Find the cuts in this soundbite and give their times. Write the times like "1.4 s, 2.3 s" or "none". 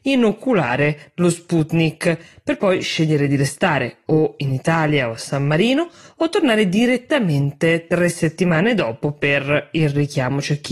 none